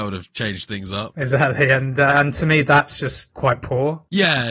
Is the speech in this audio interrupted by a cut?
no; 0 cuts

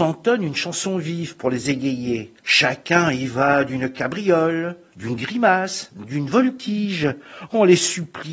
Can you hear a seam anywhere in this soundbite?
yes; 1 cut; at 2.4 s

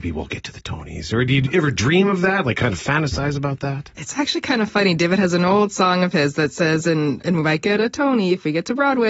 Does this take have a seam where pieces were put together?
yes; 1 cut; at 7.2 s

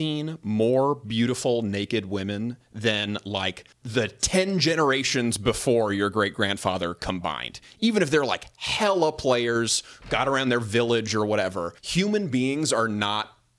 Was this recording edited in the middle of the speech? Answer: yes; 2 cuts; at 3.7 s, 11.8 s

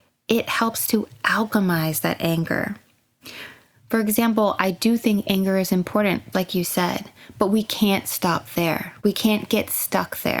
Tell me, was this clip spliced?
yes; 2 cuts; at 6.3 s, 9.0 s

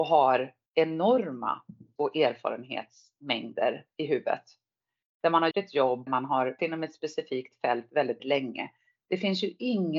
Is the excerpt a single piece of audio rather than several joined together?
no; 5 cuts; at 2.0 s, 5.5 s, 6.1 s, 6.6 s, 8.2 s

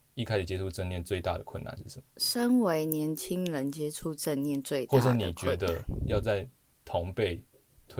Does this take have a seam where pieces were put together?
yes; 1 cut; at 2.1 s

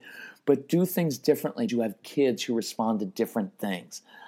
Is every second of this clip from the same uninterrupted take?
no; 2 cuts; at 1.7 s, 2.0 s

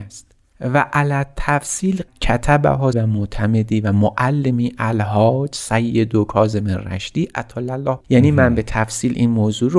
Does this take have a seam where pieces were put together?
yes; 3 cuts; at 2.1 s, 2.9 s, 8.0 s

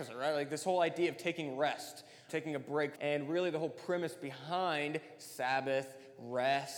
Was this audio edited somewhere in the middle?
yes; 2 cuts; at 2.3 s, 3.0 s

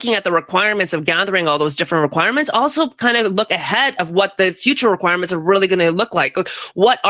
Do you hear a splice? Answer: no; 0 cuts

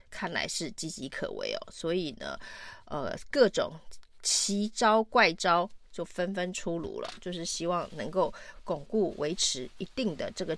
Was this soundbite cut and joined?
no; 0 cuts

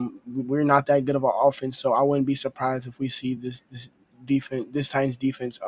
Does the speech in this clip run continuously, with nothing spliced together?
yes; 0 cuts

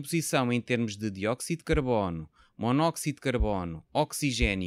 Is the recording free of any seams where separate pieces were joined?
yes; 0 cuts

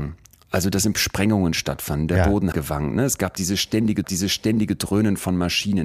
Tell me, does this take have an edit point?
yes; 3 cuts; at 0.9 s, 2.5 s, 4.0 s

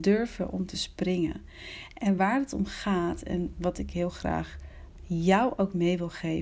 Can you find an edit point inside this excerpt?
no; 0 cuts

